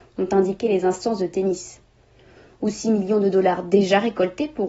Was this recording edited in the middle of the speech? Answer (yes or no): no